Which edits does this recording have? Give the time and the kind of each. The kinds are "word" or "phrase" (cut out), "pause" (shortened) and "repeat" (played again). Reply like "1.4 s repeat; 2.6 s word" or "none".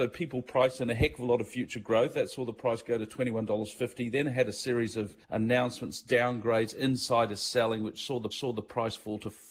5.2 s pause; 8.3 s repeat